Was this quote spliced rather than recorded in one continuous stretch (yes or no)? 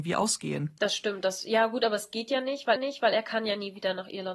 yes